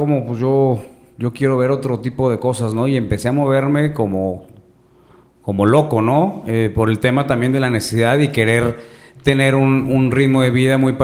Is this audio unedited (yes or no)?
yes